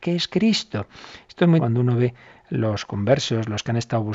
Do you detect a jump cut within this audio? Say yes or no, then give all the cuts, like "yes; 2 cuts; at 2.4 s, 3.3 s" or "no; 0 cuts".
yes; 1 cut; at 1.6 s